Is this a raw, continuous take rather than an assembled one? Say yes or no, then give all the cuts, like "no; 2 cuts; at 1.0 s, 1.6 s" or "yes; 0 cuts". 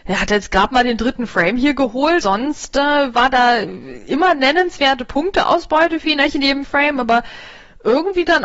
no; 1 cut; at 2.2 s